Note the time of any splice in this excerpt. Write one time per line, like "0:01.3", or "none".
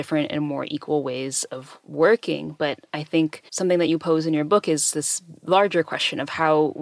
0:03.5